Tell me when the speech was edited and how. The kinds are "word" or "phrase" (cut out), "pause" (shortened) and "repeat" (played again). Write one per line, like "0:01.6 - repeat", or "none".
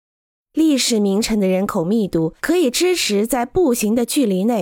0:02.4 - pause